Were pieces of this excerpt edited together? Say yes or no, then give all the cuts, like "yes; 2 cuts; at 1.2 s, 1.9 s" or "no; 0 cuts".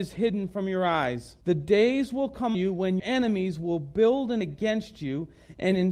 yes; 4 cuts; at 1.4 s, 2.5 s, 3.0 s, 4.4 s